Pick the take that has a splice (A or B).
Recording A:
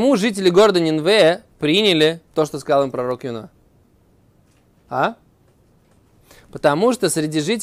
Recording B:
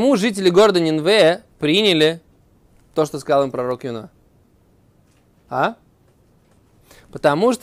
A